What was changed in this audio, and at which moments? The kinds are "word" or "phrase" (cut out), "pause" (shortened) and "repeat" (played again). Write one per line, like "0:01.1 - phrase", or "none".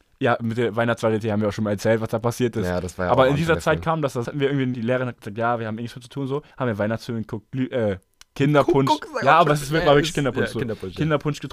0:04.2 - phrase
0:04.7 - word
0:06.5 - pause